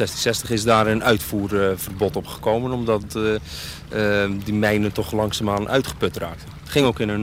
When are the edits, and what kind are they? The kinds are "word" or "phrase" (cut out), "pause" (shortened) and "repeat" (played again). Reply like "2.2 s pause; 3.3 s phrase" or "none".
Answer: none